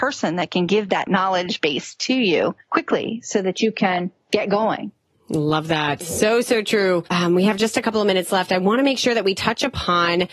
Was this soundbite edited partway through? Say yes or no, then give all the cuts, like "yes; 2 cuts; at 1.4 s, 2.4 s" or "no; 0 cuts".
no; 0 cuts